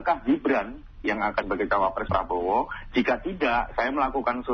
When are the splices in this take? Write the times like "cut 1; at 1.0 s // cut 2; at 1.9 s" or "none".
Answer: cut 1; at 1.0 s // cut 2; at 1.4 s // cut 3; at 2.1 s